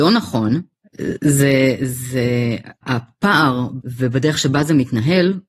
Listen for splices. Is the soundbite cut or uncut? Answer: cut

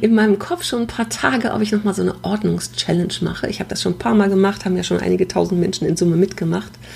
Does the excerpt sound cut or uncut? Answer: uncut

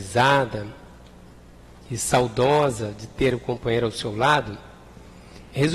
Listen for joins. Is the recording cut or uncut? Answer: uncut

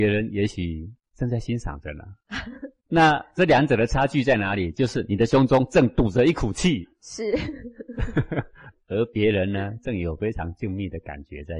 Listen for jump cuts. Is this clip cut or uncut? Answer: cut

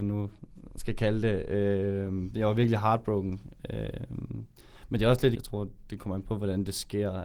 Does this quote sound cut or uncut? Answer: cut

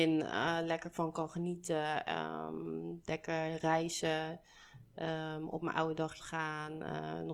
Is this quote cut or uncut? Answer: cut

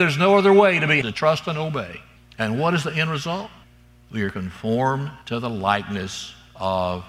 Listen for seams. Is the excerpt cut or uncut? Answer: cut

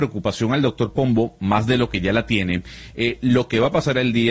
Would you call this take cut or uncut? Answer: uncut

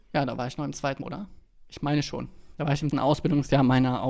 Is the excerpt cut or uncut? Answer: cut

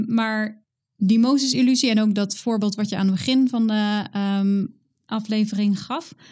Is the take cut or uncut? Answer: uncut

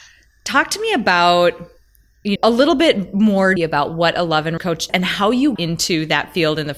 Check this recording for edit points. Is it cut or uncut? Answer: cut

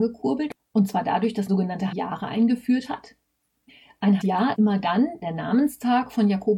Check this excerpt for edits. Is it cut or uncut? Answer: cut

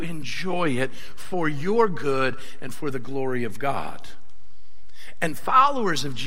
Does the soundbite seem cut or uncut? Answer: uncut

